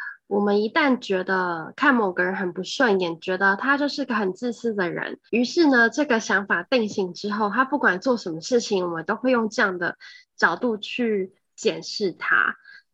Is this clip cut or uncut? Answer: cut